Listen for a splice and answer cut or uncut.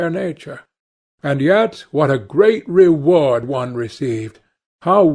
uncut